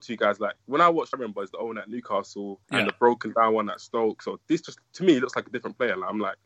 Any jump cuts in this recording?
yes; 2 cuts; at 1.1 s, 2.6 s

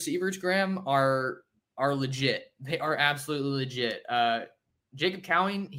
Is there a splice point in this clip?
no; 0 cuts

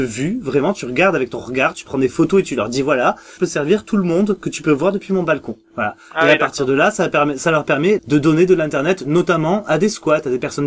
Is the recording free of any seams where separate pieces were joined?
no; 3 cuts; at 3.4 s, 5.6 s, 8.0 s

